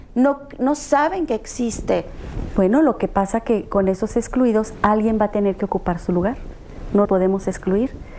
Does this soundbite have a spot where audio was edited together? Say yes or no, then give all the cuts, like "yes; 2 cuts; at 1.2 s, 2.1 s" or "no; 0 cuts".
yes; 1 cut; at 7.0 s